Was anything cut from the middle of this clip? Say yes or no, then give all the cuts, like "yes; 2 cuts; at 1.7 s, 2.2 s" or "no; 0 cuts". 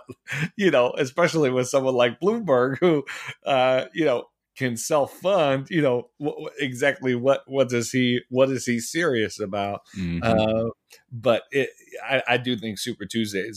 no; 0 cuts